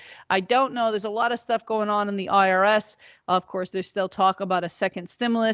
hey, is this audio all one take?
yes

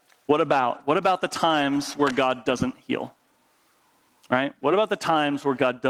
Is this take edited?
no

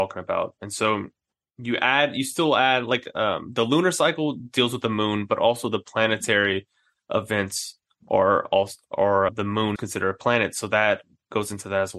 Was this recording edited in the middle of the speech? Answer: yes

